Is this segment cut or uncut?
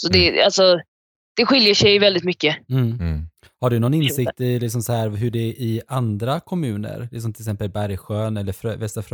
uncut